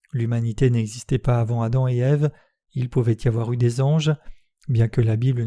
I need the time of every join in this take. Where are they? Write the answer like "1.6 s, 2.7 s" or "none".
none